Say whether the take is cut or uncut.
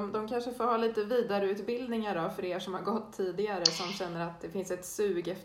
uncut